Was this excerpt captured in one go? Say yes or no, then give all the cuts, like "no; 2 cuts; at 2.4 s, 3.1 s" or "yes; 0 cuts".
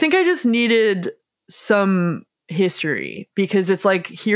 yes; 0 cuts